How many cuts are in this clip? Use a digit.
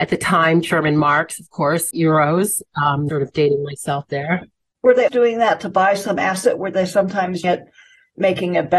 4